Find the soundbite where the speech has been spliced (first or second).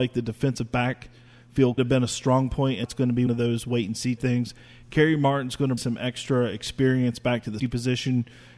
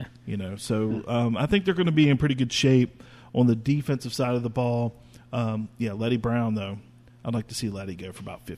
first